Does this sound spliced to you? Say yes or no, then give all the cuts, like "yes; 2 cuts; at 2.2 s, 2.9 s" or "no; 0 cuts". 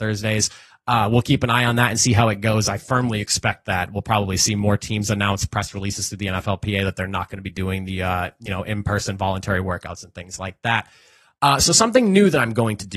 no; 0 cuts